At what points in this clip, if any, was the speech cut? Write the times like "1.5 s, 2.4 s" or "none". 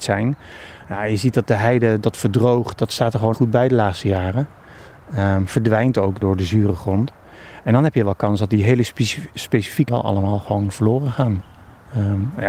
2.0 s, 2.8 s, 3.3 s, 6.2 s, 9.9 s